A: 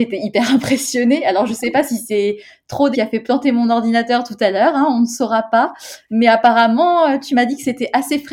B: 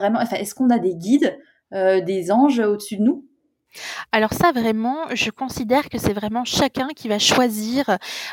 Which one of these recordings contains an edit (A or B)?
A